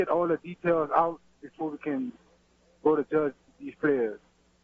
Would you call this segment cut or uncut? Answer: uncut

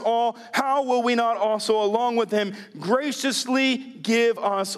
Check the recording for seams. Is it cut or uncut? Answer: uncut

